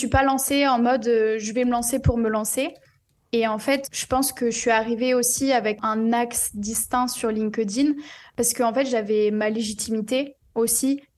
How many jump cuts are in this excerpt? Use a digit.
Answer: 1